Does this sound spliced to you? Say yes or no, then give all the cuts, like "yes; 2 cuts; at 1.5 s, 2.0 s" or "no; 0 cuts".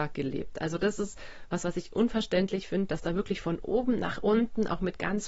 no; 0 cuts